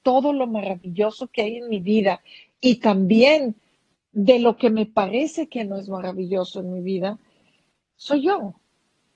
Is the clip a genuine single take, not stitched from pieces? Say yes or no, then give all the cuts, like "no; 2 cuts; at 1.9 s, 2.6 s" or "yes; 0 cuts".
yes; 0 cuts